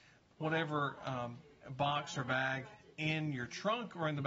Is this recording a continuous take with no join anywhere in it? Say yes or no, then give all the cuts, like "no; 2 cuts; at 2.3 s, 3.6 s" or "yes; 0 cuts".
yes; 0 cuts